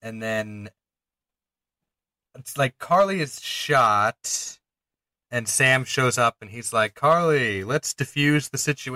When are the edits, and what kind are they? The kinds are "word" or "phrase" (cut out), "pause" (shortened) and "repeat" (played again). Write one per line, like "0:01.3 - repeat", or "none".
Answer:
none